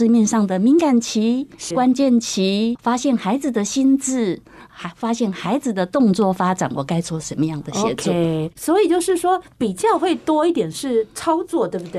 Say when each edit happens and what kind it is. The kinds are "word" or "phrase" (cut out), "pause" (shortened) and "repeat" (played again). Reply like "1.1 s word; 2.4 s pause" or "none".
1.7 s word